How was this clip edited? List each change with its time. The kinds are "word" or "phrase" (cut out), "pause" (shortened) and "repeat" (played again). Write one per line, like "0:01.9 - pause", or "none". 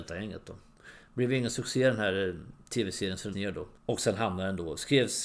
0:03.3 - word
0:03.8 - pause

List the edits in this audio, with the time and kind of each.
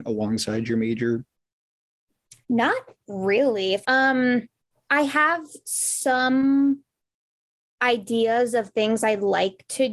0:02.4 - pause
0:03.8 - phrase
0:04.7 - pause

